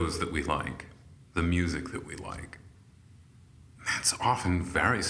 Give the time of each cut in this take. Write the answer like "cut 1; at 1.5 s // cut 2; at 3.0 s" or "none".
none